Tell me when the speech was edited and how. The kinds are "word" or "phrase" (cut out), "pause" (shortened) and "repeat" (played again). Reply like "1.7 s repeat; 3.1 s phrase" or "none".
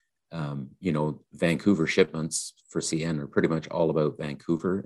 none